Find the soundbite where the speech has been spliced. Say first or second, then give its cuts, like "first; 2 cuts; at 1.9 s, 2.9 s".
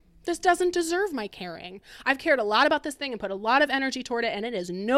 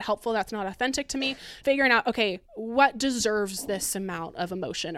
second; 2 cuts; at 1.6 s, 2.5 s